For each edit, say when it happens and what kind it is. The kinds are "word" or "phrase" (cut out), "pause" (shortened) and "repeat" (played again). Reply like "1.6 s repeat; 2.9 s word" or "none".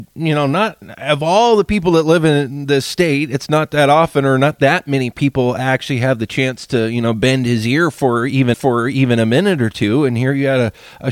8.5 s repeat